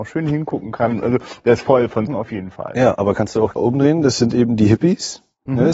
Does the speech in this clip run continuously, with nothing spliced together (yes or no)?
no